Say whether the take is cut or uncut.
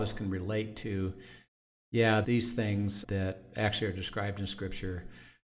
cut